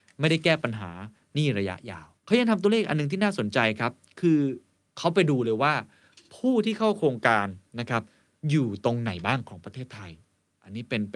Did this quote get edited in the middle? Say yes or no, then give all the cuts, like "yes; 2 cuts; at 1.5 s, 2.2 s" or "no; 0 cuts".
yes; 1 cut; at 2.2 s